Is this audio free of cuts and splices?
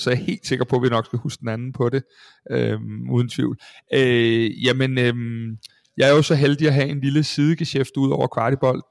yes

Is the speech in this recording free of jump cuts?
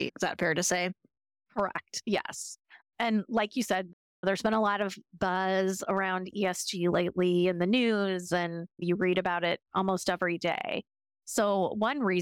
yes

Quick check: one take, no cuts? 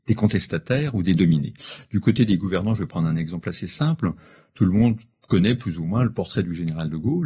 yes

